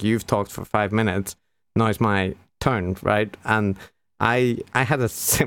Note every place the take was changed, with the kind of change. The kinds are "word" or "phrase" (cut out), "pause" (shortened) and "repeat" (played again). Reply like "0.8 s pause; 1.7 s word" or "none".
none